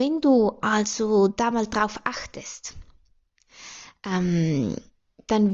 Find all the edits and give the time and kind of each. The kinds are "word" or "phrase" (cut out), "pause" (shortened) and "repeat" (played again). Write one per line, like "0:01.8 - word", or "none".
none